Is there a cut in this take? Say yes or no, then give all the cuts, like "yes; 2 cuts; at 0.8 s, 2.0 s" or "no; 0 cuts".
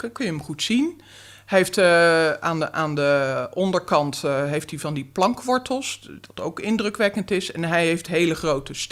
no; 0 cuts